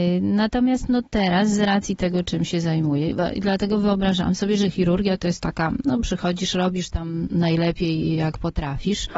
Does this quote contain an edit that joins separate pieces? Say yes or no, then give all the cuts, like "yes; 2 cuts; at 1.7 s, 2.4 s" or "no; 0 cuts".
no; 0 cuts